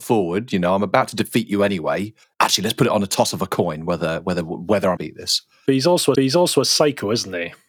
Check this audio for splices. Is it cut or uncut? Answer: cut